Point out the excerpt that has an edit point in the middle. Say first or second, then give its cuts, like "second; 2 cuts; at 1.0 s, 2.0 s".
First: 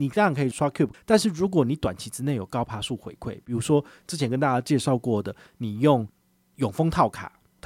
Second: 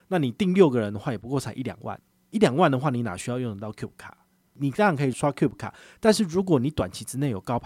first; 1 cut; at 0.9 s